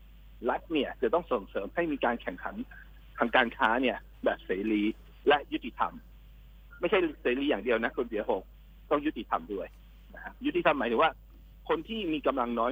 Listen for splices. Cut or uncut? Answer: uncut